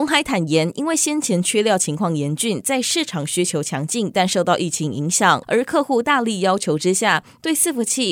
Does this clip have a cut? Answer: yes; 1 cut; at 5.4 s

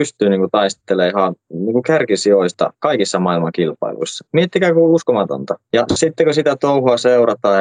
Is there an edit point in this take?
yes; 1 cut; at 4.3 s

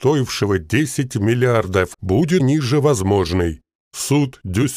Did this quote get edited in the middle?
yes; 2 cuts; at 1.9 s, 2.4 s

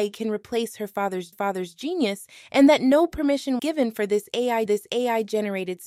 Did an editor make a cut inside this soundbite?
yes; 3 cuts; at 1.3 s, 3.6 s, 4.7 s

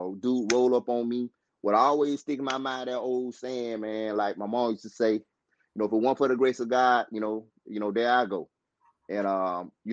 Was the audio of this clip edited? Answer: no; 0 cuts

